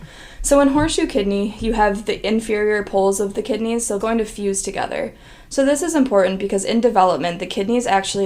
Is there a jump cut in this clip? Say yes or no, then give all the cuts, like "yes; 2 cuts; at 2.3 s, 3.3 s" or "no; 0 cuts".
yes; 1 cut; at 4.0 s